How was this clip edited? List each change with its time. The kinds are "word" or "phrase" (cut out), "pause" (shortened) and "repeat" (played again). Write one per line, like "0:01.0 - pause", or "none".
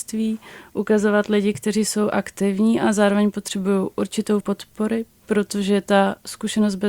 0:04.4 - word